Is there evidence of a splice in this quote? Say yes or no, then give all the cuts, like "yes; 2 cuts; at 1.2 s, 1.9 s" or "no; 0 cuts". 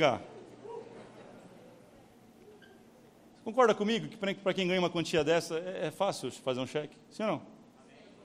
no; 0 cuts